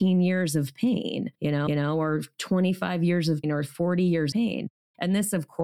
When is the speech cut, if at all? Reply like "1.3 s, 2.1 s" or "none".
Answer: 1.3 s, 1.7 s, 3.4 s, 4.3 s